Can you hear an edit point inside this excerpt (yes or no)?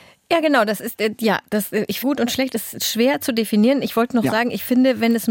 yes